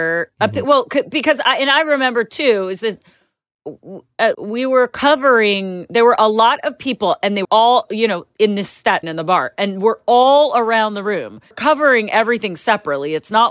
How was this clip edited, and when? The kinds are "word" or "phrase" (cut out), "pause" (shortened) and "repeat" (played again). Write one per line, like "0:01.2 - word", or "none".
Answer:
0:04.3 - word
0:07.4 - word
0:09.0 - word
0:11.5 - phrase